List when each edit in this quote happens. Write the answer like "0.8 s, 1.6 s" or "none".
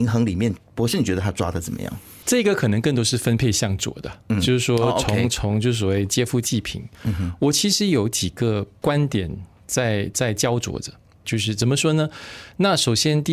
none